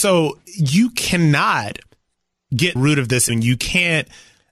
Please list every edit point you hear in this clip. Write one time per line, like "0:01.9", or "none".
0:02.8
0:03.3